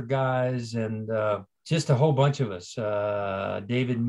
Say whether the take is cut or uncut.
cut